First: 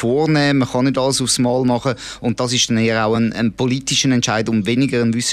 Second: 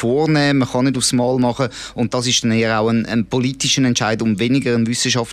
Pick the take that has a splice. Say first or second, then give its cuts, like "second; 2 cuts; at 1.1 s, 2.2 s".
second; 1 cut; at 0.9 s